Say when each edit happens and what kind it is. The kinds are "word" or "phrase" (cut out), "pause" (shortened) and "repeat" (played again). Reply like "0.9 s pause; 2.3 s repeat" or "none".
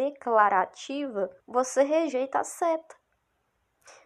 1.4 s pause